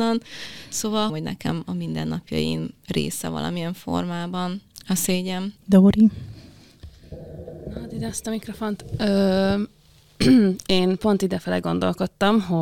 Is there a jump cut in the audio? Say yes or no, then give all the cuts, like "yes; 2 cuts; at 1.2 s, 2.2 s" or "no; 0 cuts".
yes; 2 cuts; at 1.1 s, 5.6 s